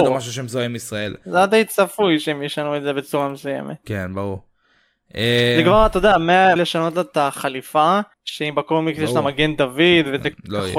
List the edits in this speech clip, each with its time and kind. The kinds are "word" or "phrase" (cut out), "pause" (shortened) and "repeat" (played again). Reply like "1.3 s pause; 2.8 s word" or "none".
6.6 s word; 8.1 s pause